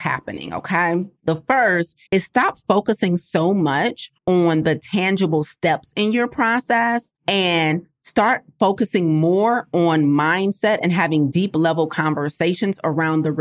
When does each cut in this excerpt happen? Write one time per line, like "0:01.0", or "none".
0:01.2
0:02.1
0:04.2
0:07.2